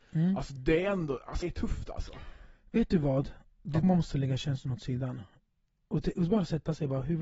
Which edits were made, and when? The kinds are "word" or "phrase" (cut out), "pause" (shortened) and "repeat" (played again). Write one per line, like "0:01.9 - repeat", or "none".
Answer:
0:01.4 - word
0:03.8 - word